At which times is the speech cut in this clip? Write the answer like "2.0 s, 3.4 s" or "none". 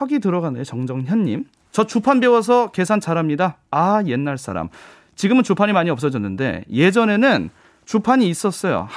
none